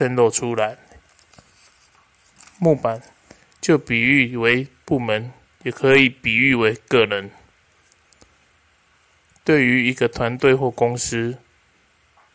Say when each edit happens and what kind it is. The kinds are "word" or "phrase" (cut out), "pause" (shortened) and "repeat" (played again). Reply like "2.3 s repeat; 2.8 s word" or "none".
none